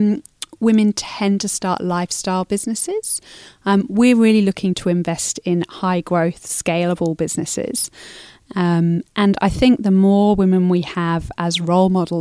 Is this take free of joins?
yes; 0 cuts

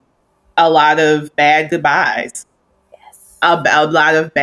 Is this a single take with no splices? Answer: no; 1 cut; at 1.3 s

